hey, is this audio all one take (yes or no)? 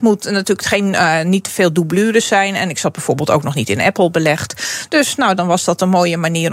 yes